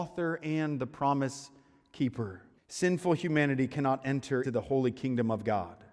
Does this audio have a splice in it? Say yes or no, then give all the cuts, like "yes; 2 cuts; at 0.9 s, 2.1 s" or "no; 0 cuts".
yes; 2 cuts; at 2.6 s, 4.4 s